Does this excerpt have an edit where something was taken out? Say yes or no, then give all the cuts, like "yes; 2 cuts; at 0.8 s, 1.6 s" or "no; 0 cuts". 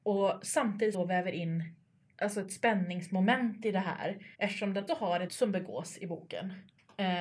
yes; 4 cuts; at 0.9 s, 4.3 s, 4.9 s, 5.3 s